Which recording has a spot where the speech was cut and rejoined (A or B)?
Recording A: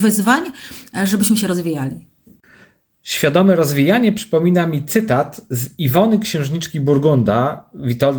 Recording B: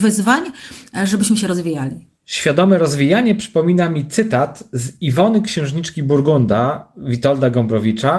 B